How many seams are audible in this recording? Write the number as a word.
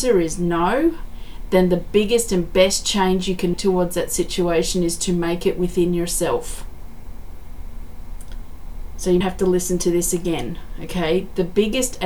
two